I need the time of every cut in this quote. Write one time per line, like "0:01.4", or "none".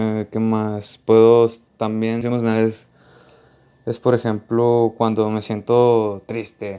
0:02.2